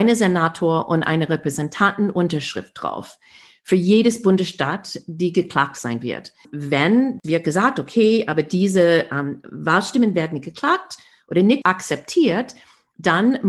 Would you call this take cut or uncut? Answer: cut